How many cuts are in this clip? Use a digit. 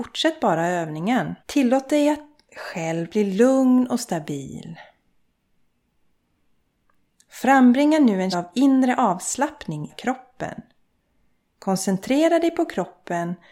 4